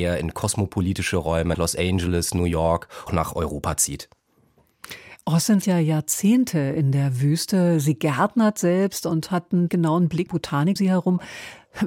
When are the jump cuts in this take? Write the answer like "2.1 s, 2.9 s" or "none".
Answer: 1.5 s, 3.1 s, 5.6 s, 9.7 s, 10.3 s, 10.8 s